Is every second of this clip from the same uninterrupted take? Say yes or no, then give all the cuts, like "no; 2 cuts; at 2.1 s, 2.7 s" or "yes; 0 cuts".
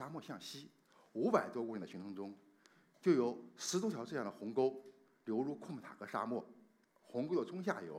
yes; 0 cuts